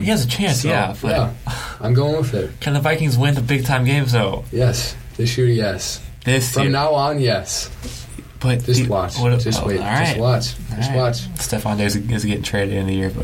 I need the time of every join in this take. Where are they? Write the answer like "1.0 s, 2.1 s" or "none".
none